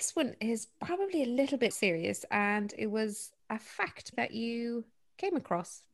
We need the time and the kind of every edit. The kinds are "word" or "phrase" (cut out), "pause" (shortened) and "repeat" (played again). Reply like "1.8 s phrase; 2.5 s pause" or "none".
1.7 s word; 4.1 s word